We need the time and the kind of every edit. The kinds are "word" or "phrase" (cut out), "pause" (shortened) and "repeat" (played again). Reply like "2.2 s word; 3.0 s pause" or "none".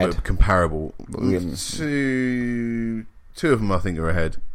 1.4 s word